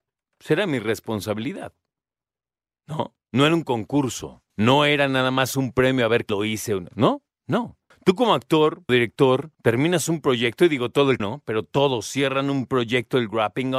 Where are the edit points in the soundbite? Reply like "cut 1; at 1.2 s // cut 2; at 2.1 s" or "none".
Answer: cut 1; at 4.5 s // cut 2; at 6.3 s // cut 3; at 7.9 s // cut 4; at 8.9 s // cut 5; at 9.5 s // cut 6; at 11.2 s

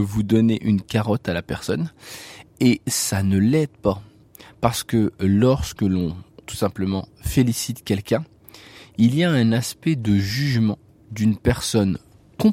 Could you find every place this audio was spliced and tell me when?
cut 1; at 6.4 s

